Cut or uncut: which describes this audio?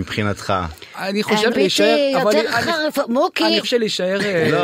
cut